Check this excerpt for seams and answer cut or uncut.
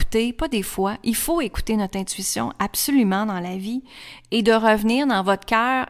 uncut